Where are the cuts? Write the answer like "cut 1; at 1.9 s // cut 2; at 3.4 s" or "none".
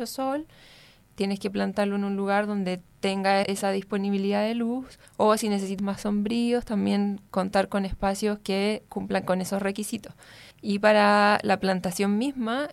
cut 1; at 3.4 s // cut 2; at 5.1 s // cut 3; at 5.8 s // cut 4; at 10.5 s